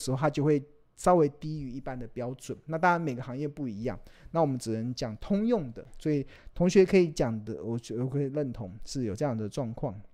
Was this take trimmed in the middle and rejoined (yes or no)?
no